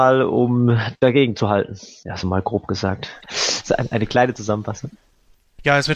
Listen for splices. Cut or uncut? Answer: uncut